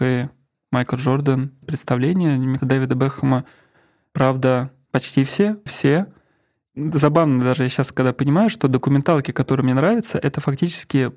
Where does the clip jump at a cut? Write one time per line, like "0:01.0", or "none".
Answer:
0:01.6
0:02.6
0:04.9
0:05.7